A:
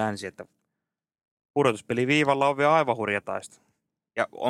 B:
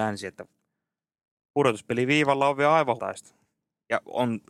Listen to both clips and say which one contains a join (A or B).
B